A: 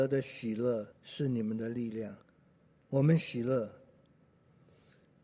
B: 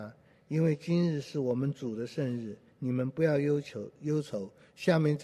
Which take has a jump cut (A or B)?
A